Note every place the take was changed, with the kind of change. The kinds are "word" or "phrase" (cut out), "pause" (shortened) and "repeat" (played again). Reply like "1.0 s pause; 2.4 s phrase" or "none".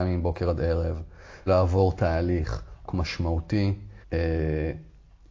1.5 s phrase; 2.9 s word; 4.0 s pause